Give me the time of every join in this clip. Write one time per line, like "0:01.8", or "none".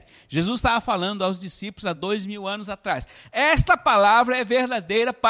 none